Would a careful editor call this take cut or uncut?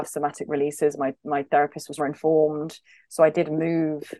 cut